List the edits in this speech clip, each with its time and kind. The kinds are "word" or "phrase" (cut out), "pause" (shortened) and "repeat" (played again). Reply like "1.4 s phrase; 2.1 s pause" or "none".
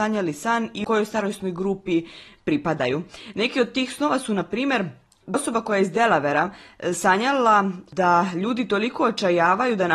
5.3 s word